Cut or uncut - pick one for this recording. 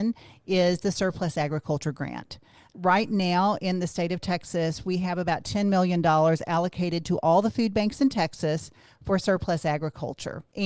uncut